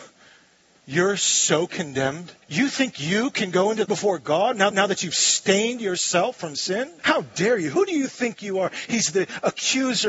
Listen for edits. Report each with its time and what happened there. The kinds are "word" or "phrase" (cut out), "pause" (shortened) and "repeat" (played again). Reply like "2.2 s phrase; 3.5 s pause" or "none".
2.4 s pause; 3.8 s phrase; 4.7 s repeat; 7.0 s pause